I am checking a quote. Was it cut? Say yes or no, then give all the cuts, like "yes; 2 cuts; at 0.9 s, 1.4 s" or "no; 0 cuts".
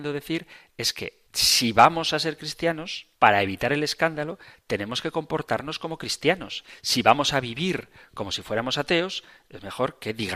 yes; 2 cuts; at 1.3 s, 3.2 s